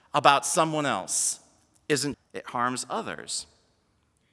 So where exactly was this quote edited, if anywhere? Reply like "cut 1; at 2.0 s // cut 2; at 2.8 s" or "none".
cut 1; at 2.1 s

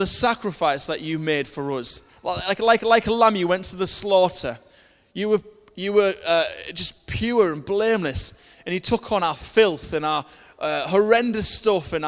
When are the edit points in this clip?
cut 1; at 2.1 s // cut 2; at 2.8 s

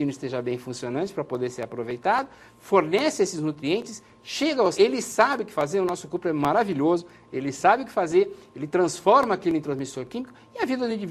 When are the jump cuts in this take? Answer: cut 1; at 2.5 s // cut 2; at 4.7 s

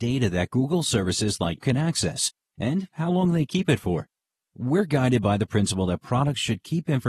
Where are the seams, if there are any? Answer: cut 1; at 1.6 s

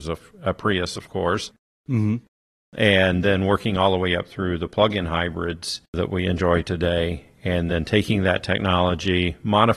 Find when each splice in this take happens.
none

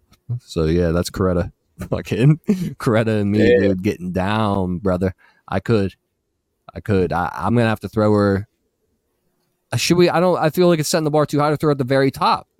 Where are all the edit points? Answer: none

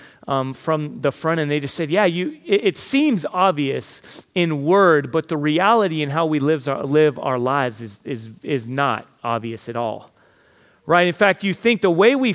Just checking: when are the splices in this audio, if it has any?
none

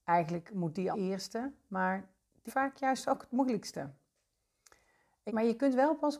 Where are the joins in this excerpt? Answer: cut 1; at 0.9 s // cut 2; at 2.5 s // cut 3; at 5.3 s

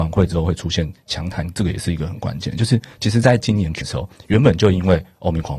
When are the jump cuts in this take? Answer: cut 1; at 3.8 s

